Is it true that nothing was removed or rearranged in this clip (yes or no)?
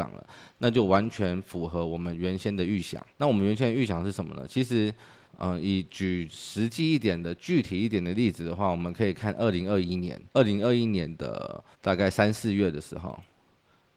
no